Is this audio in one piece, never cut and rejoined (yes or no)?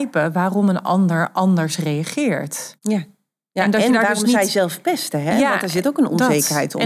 yes